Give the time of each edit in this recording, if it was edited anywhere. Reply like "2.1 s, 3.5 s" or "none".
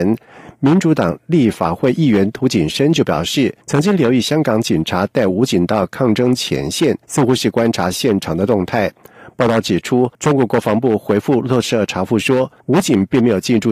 3.6 s, 7.0 s, 10.1 s, 12.6 s